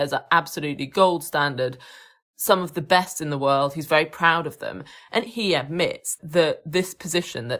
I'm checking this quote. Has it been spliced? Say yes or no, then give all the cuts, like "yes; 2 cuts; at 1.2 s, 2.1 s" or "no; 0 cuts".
yes; 1 cut; at 5.3 s